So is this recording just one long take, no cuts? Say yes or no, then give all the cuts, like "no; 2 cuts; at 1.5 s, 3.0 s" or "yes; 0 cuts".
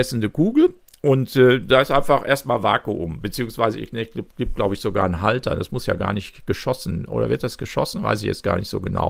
yes; 0 cuts